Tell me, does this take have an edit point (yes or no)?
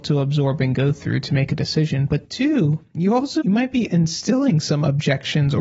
no